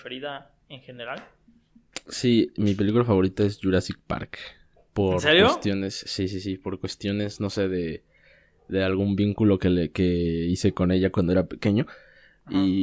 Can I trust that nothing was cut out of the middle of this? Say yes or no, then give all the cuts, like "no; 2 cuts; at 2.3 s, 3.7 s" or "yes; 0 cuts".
yes; 0 cuts